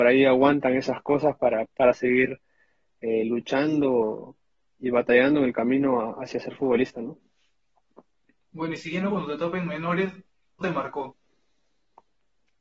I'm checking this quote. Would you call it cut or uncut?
cut